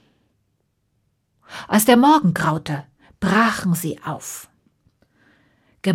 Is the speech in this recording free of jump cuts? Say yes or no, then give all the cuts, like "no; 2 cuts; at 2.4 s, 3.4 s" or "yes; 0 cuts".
yes; 0 cuts